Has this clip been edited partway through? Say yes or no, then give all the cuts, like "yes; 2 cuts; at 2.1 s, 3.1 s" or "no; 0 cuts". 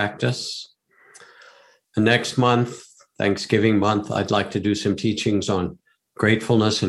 no; 0 cuts